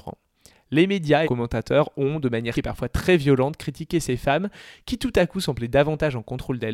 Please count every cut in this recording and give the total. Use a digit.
2